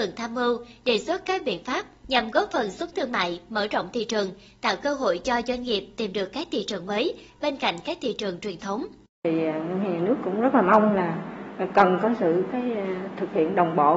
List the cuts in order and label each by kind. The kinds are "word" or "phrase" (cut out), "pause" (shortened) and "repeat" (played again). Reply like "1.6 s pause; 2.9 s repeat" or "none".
2.9 s word; 9.1 s pause